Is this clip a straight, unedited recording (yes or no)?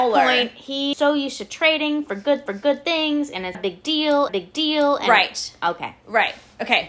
no